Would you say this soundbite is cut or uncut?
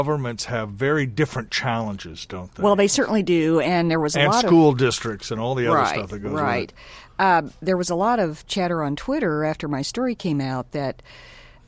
uncut